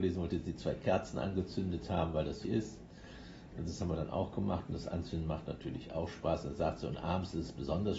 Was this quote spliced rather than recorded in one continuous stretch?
yes; 1 cut; at 2.4 s

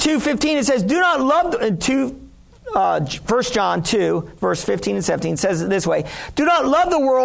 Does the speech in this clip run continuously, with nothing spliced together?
yes; 0 cuts

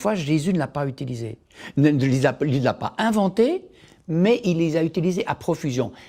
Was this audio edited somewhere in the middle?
no; 0 cuts

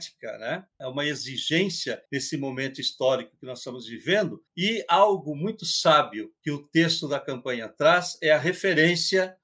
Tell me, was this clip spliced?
yes; 3 cuts; at 2.1 s, 4.5 s, 6.4 s

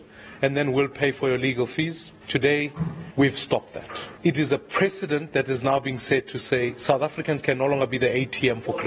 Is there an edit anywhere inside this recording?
yes; 1 cut; at 4.2 s

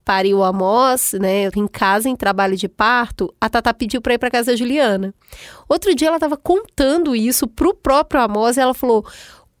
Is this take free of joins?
no; 1 cut; at 1.5 s

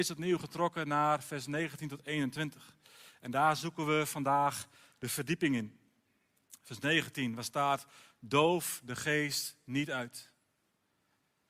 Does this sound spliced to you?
no; 0 cuts

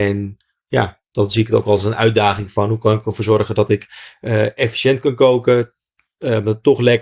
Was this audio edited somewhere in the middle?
no; 0 cuts

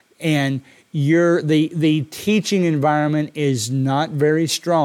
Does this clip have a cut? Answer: no; 0 cuts

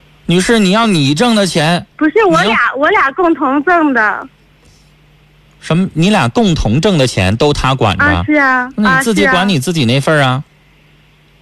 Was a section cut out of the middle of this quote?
no; 0 cuts

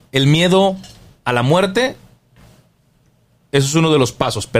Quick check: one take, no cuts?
yes; 0 cuts

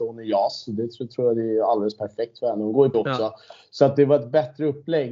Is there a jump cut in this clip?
yes; 1 cut; at 2.9 s

